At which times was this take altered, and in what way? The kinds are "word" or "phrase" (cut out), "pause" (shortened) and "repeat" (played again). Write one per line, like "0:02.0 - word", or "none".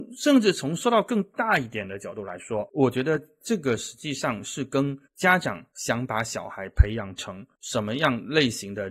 0:05.0 - pause
0:05.7 - pause